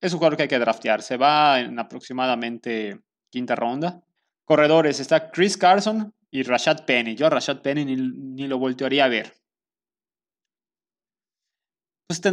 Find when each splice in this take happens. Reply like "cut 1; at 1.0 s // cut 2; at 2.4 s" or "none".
cut 1; at 4.2 s // cut 2; at 6.2 s